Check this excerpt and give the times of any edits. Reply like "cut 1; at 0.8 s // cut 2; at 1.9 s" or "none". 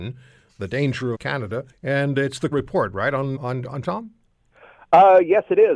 cut 1; at 1.1 s // cut 2; at 1.7 s // cut 3; at 2.5 s // cut 4; at 3.4 s // cut 5; at 3.8 s